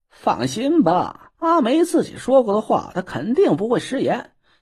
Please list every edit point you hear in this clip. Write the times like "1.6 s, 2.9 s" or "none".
1.3 s